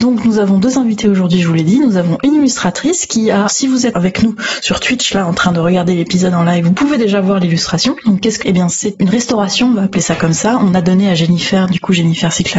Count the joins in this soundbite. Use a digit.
2